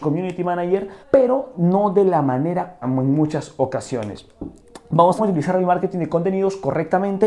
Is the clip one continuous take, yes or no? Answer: no